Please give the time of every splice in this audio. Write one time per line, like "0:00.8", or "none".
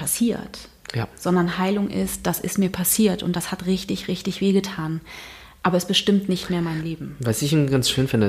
none